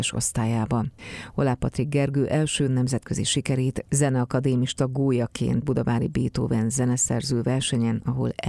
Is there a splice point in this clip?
yes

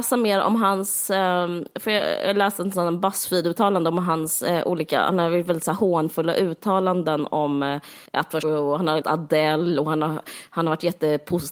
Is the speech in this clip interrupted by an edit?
yes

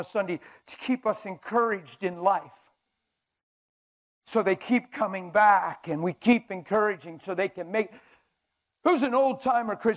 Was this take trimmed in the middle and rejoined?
no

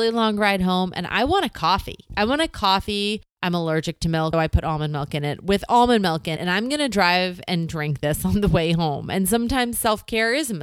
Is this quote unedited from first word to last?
no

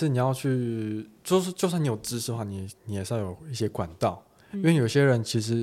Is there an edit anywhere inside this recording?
no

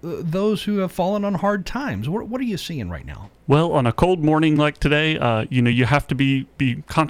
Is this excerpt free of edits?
yes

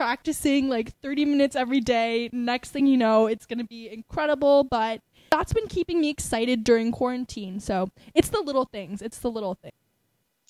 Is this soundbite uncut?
yes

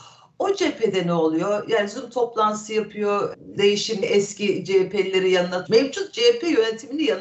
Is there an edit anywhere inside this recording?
yes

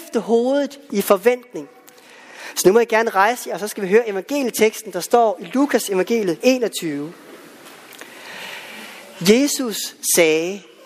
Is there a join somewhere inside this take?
yes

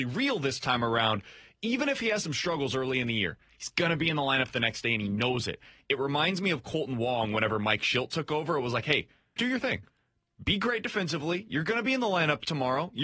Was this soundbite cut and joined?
yes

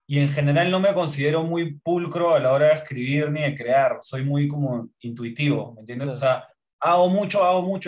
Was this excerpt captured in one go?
no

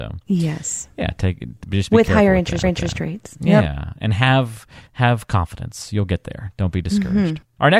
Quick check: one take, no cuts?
no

